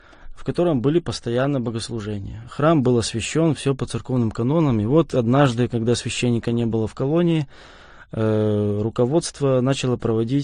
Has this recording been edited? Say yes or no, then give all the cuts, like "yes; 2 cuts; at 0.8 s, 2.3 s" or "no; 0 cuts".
no; 0 cuts